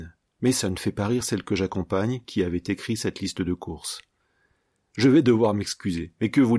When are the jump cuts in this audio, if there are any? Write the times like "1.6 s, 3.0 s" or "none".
none